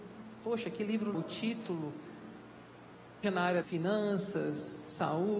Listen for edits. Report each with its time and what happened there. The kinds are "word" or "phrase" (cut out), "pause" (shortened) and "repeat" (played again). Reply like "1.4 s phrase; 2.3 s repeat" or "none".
1.1 s word; 3.2 s word; 3.6 s word